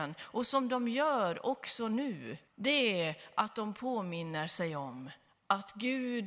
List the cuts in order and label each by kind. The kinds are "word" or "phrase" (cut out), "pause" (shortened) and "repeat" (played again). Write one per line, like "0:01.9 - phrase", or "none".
0:02.5 - pause
0:05.3 - pause